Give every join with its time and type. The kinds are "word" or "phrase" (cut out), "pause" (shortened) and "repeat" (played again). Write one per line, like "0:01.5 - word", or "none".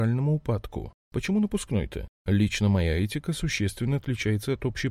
none